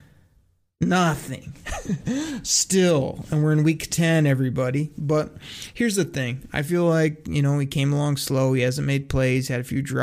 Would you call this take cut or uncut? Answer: uncut